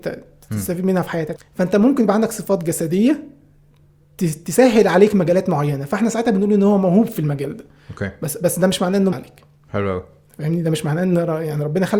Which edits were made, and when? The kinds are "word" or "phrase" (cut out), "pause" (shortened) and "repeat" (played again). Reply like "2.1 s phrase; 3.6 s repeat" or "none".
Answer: 1.4 s word; 9.1 s word